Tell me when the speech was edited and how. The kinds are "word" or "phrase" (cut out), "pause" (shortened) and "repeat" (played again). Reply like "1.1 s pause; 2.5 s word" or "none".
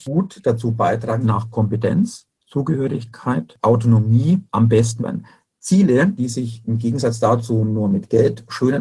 1.2 s phrase; 3.6 s word; 4.5 s pause; 5.0 s word